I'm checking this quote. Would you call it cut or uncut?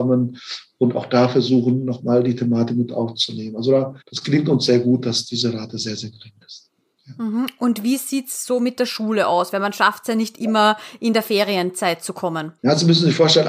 cut